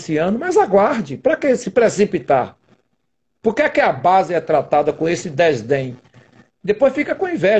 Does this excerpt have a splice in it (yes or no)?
no